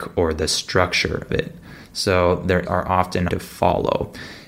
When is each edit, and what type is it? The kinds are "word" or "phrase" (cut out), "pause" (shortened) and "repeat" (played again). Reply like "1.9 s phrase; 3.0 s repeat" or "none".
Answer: 1.3 s word; 2.6 s word; 3.3 s word